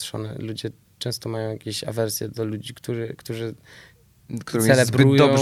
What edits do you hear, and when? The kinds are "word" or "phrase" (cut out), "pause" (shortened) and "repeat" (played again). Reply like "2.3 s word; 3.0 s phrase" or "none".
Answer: none